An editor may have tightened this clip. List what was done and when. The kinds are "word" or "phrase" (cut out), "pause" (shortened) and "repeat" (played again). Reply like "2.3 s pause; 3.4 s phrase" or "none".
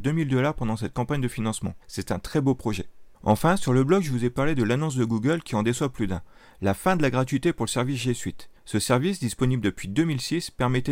1.8 s pause; 3.1 s pause; 8.6 s pause